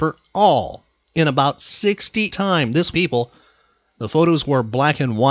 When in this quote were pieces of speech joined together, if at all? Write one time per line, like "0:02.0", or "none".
0:02.3
0:02.9